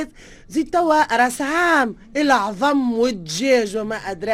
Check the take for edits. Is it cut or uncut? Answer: uncut